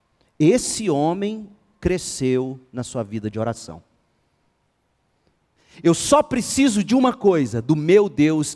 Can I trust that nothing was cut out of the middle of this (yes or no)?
yes